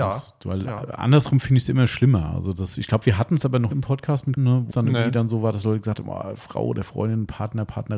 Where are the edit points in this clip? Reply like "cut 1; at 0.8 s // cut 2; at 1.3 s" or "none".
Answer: cut 1; at 3.7 s // cut 2; at 4.4 s // cut 3; at 4.7 s